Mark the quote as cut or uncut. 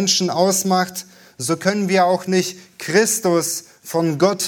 uncut